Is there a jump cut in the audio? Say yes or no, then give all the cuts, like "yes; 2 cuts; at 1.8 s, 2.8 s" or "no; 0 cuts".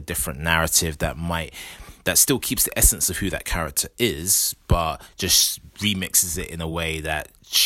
no; 0 cuts